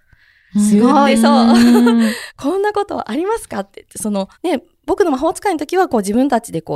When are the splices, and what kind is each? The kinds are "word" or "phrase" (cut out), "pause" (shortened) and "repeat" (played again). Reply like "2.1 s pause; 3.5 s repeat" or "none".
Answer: 4.3 s pause